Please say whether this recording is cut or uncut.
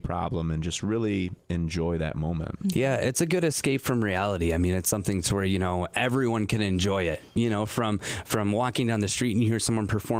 uncut